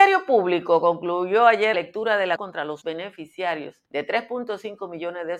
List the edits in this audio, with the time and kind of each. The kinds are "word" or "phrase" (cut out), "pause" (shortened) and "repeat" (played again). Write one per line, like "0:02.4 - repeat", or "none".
0:01.7 - word
0:02.4 - word
0:02.8 - word
0:03.9 - pause